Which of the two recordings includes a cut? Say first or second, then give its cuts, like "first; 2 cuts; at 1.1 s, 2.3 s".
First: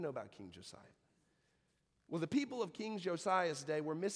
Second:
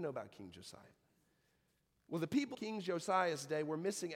second; 1 cut; at 2.5 s